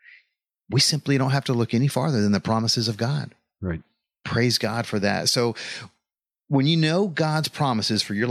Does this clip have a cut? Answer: no; 0 cuts

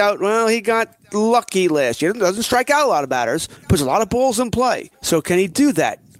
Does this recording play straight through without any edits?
no; 2 cuts; at 3.6 s, 4.9 s

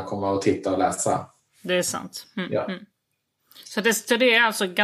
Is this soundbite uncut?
yes; 0 cuts

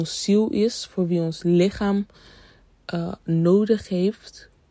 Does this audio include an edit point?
no; 0 cuts

